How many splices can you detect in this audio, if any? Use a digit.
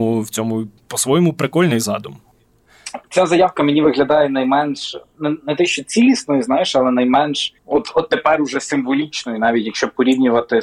1